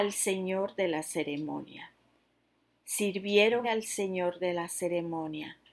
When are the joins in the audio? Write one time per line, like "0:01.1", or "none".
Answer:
0:03.6